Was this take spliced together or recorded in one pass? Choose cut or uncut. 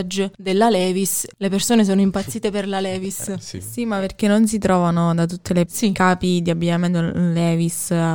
cut